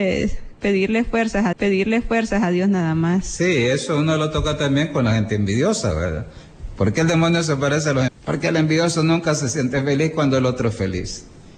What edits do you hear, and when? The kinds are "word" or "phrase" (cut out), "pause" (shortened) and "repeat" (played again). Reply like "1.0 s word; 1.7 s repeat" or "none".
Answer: 1.5 s repeat; 8.1 s word

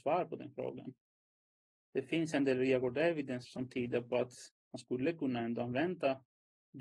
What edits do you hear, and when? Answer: 3.4 s word

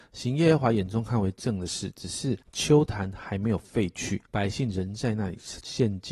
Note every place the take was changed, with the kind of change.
2.4 s pause; 4.3 s pause

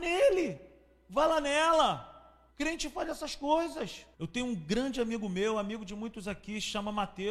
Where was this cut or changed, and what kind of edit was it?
2.5 s pause; 4.1 s pause

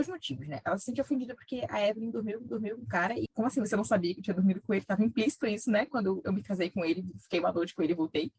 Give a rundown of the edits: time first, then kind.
2.5 s repeat; 3.3 s phrase

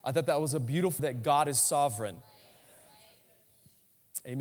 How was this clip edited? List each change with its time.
1.0 s word

